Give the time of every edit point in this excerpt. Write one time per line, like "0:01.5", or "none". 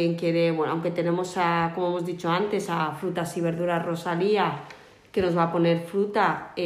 none